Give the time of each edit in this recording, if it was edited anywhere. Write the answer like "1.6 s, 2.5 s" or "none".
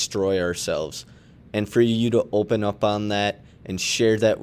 none